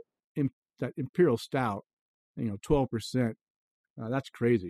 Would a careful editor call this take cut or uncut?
uncut